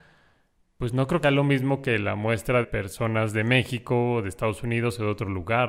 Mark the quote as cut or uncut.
cut